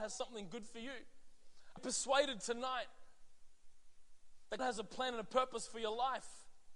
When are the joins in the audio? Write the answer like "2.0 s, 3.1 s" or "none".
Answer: 1.8 s, 4.6 s